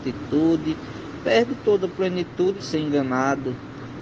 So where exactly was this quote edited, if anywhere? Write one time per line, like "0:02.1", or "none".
0:02.6